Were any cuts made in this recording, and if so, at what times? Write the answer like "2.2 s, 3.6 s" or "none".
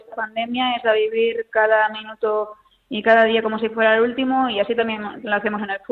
none